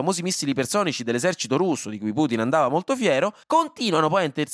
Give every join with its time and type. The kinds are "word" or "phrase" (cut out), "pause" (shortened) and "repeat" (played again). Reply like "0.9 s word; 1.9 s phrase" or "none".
3.4 s pause